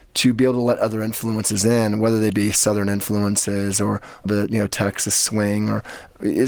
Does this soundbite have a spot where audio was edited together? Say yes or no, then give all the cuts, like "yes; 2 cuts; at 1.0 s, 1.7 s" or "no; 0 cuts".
yes; 1 cut; at 4.2 s